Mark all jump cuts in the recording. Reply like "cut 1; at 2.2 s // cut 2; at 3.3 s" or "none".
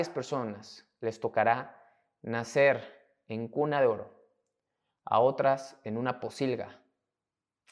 none